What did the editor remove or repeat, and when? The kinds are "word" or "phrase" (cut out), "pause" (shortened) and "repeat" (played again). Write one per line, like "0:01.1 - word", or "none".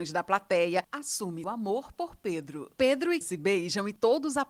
0:01.4 - word
0:03.2 - word